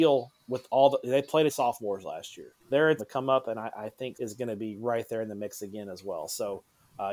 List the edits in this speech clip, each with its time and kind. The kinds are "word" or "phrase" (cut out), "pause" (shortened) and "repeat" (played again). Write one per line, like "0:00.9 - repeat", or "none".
0:01.5 - phrase
0:02.6 - pause
0:03.0 - phrase
0:04.1 - phrase